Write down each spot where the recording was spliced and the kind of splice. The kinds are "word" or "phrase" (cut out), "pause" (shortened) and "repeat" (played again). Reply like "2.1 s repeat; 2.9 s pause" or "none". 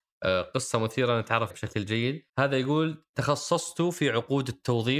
1.5 s word; 2.3 s pause; 3.1 s pause